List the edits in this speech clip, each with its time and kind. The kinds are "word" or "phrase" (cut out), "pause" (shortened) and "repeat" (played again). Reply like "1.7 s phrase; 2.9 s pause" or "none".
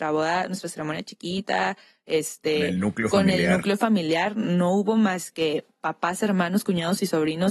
none